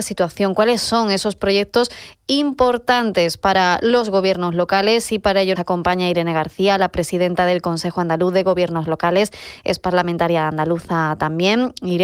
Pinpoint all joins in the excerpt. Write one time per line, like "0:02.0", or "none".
0:05.6